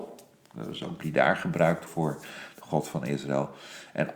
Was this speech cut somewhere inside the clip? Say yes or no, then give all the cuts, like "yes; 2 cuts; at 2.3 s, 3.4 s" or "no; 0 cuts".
yes; 2 cuts; at 1.0 s, 1.9 s